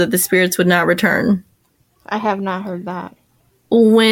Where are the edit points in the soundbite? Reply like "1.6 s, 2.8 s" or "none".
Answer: none